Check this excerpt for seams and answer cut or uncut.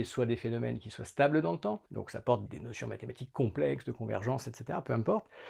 cut